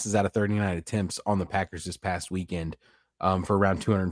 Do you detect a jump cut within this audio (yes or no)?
no